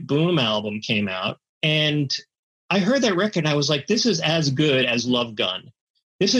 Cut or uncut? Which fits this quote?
cut